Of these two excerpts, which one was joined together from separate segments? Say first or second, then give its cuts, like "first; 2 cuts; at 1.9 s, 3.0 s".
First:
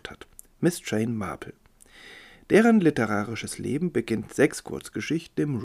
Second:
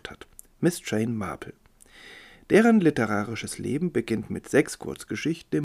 first; 1 cut; at 4.3 s